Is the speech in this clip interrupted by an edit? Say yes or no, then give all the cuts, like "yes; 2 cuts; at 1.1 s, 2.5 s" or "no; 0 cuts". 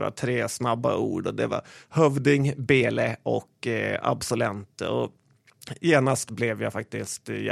no; 0 cuts